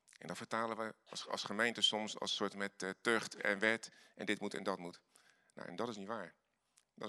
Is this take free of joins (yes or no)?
yes